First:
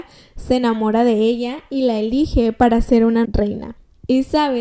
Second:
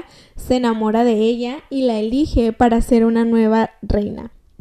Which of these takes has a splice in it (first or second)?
first